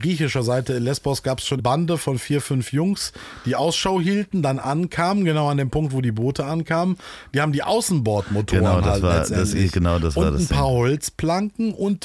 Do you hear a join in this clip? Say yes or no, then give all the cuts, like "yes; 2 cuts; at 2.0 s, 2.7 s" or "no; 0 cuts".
yes; 1 cut; at 1.6 s